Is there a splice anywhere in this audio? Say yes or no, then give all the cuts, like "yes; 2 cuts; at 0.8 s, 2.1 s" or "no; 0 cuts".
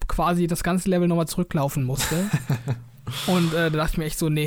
no; 0 cuts